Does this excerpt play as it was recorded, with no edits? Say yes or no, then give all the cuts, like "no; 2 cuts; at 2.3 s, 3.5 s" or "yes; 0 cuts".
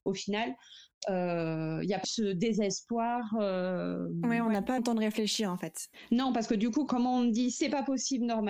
no; 3 cuts; at 2.0 s, 4.8 s, 6.9 s